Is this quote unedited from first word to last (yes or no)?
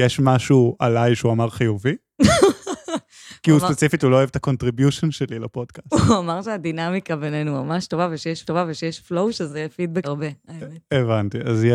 no